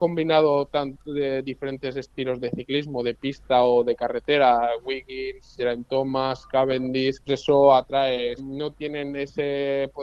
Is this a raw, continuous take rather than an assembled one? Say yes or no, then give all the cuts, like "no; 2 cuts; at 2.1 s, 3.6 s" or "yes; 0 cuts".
no; 4 cuts; at 2.4 s, 5.6 s, 7.3 s, 8.4 s